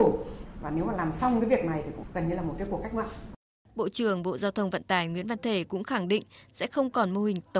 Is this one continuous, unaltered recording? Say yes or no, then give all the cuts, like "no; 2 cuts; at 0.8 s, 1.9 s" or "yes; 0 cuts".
yes; 0 cuts